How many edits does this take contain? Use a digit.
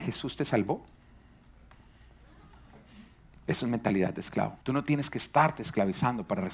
1